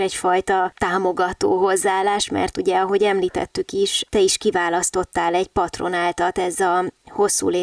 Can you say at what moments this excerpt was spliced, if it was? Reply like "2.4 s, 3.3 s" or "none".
none